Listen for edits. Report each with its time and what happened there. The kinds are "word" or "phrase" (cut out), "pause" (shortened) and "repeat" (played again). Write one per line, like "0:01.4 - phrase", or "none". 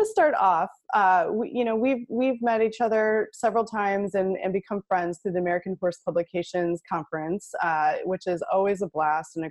none